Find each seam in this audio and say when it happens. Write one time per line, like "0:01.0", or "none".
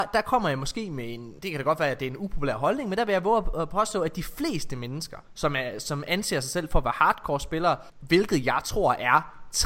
0:01.4
0:05.2
0:07.9